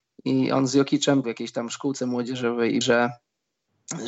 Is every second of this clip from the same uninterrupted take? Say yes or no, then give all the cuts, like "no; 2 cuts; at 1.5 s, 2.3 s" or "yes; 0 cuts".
no; 2 cuts; at 1.2 s, 2.8 s